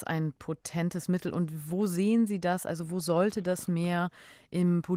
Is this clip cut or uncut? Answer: uncut